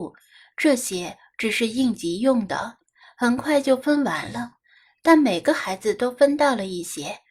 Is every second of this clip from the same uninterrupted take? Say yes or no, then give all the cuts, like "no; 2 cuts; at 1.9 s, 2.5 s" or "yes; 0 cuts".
yes; 0 cuts